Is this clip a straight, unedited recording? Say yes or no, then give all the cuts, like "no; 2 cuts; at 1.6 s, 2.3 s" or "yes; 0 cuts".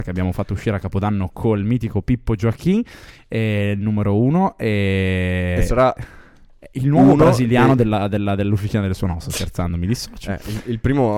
yes; 0 cuts